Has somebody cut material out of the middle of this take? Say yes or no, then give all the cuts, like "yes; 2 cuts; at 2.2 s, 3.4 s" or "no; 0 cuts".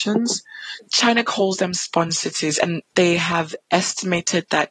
no; 0 cuts